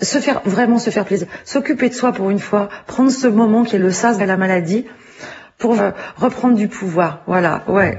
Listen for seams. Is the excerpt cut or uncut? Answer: cut